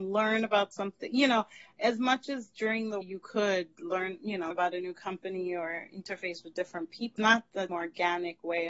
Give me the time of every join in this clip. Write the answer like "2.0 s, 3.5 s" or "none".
3.0 s, 4.5 s, 7.2 s, 7.7 s

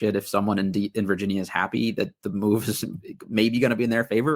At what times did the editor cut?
none

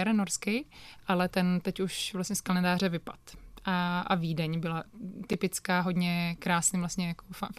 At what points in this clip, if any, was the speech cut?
none

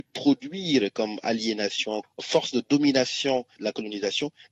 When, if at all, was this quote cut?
2.0 s

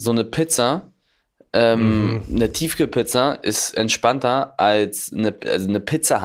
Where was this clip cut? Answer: none

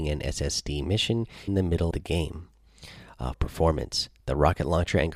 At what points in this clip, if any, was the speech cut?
1.5 s, 1.9 s, 3.3 s

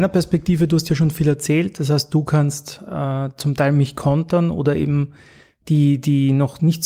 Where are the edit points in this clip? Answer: none

